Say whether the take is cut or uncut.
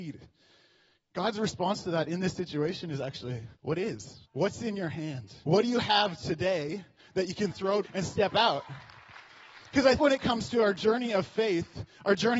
cut